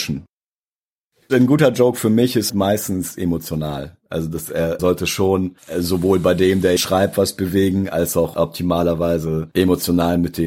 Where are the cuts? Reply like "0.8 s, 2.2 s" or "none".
2.5 s, 4.8 s, 6.8 s